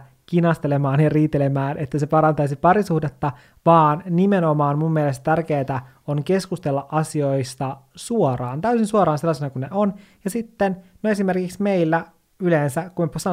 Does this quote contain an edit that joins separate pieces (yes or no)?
no